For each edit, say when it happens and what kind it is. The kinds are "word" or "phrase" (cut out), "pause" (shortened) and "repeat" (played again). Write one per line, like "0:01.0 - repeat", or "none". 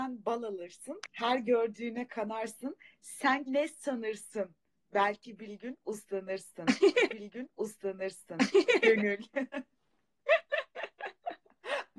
0:03.5 - word
0:07.1 - repeat